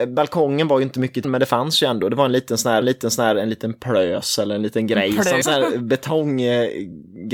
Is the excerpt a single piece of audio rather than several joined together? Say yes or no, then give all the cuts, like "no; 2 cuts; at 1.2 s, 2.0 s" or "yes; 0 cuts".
no; 3 cuts; at 1.2 s, 2.8 s, 5.4 s